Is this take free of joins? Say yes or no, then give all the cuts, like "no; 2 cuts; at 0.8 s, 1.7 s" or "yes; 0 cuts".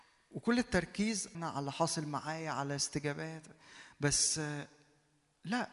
no; 1 cut; at 1.3 s